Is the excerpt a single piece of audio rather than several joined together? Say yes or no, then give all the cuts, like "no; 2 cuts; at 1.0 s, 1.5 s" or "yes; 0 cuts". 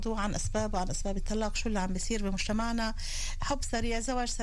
yes; 0 cuts